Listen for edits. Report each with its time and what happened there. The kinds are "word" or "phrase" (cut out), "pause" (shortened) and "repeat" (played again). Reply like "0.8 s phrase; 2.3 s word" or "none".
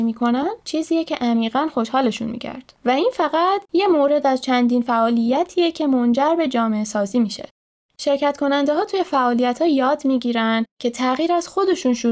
none